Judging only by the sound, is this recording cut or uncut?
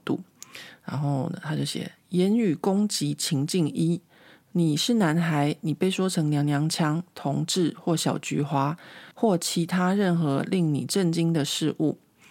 cut